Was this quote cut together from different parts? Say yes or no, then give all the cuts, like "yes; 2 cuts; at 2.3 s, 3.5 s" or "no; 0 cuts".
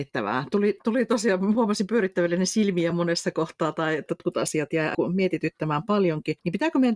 no; 0 cuts